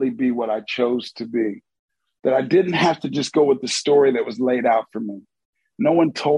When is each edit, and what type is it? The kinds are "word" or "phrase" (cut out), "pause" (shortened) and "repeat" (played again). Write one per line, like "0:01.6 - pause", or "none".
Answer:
none